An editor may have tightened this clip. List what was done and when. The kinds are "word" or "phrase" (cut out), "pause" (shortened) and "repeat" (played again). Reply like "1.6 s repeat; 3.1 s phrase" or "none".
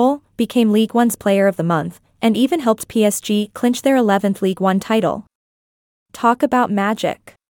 none